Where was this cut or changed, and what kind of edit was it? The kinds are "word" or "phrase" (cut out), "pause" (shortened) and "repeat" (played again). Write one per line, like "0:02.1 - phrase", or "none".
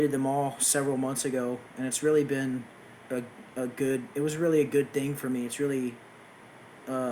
0:03.0 - pause